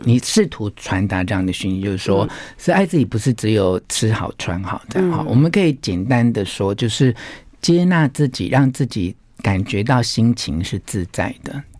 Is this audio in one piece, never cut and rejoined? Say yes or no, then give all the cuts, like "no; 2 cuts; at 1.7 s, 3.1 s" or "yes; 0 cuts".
yes; 0 cuts